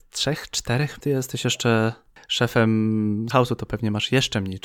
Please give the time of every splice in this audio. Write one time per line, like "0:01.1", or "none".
0:01.0
0:03.3